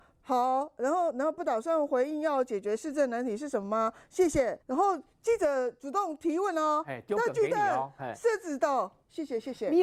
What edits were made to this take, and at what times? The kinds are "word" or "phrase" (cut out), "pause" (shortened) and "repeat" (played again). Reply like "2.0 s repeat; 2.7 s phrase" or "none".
4.6 s pause